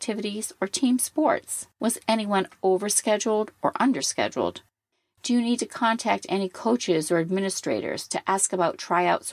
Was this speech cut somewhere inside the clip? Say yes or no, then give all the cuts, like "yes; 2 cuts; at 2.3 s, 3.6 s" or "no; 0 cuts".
yes; 1 cut; at 1.7 s